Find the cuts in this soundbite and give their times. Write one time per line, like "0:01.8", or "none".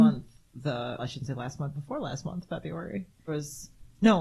0:01.0
0:01.7
0:03.3